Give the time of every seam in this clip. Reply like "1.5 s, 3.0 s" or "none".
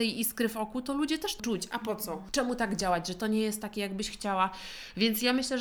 1.4 s, 3.2 s